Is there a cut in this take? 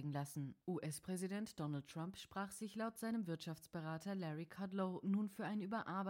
no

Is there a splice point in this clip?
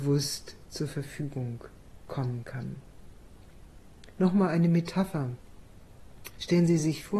no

